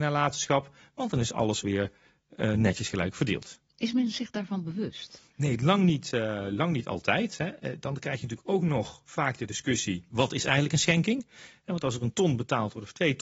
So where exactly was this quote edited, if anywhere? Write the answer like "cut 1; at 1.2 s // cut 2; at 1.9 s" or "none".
none

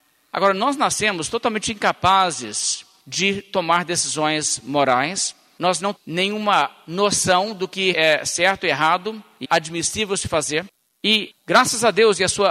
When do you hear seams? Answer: cut 1; at 6.0 s // cut 2; at 7.9 s // cut 3; at 9.4 s

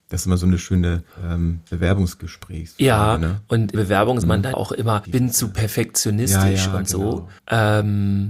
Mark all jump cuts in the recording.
cut 1; at 1.1 s // cut 2; at 3.7 s // cut 3; at 4.2 s // cut 4; at 4.5 s // cut 5; at 5.0 s // cut 6; at 7.4 s

